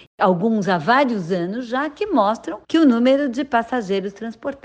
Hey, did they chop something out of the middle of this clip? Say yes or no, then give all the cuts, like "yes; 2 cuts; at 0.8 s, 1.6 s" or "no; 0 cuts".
yes; 1 cut; at 2.6 s